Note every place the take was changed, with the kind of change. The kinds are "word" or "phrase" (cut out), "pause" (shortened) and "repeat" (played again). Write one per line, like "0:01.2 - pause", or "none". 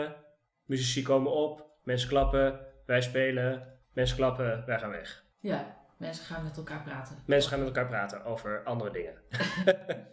0:03.8 - pause
0:05.3 - pause